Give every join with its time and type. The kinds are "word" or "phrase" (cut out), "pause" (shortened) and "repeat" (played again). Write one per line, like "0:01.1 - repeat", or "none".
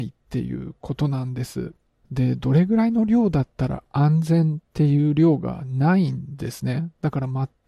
0:02.0 - pause